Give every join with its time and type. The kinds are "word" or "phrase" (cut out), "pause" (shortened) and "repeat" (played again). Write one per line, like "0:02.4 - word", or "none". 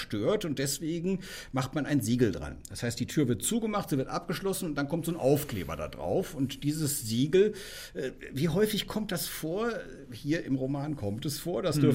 none